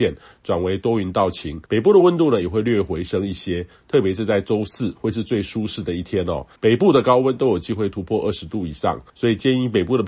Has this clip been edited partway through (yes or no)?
yes